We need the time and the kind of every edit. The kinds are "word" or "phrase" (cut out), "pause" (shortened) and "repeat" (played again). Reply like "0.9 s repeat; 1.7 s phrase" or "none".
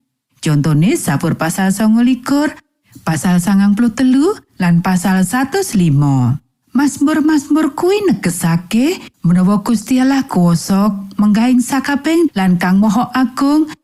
9.1 s pause; 10.3 s word; 12.3 s word